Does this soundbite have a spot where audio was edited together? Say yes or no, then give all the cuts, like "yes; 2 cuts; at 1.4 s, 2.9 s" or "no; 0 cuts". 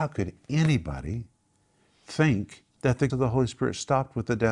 yes; 2 cuts; at 2.7 s, 3.1 s